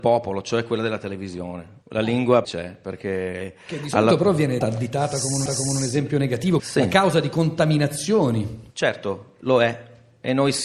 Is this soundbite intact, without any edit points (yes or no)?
no